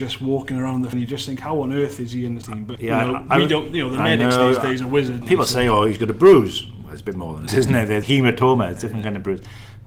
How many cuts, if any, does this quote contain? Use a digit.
6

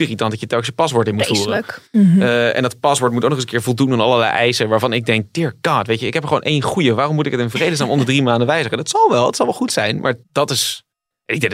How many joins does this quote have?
1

